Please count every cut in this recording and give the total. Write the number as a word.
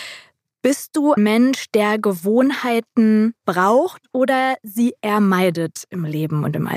two